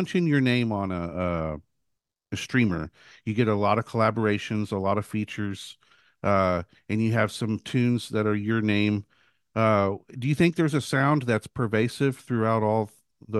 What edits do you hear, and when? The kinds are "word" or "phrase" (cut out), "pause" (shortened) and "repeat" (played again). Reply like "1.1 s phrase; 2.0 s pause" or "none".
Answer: none